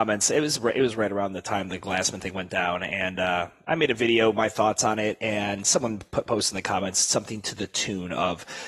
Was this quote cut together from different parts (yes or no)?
no